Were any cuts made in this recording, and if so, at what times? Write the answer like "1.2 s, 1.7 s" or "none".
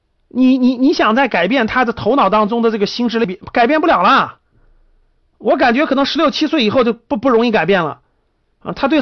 none